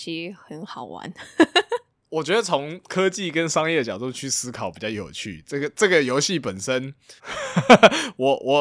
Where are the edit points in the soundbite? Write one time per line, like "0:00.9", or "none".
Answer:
0:07.2